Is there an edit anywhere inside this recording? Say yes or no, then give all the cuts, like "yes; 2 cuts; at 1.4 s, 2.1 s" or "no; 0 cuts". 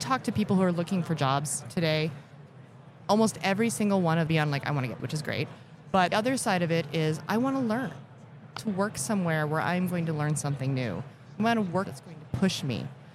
yes; 5 cuts; at 4.3 s, 5.0 s, 6.1 s, 8.6 s, 11.8 s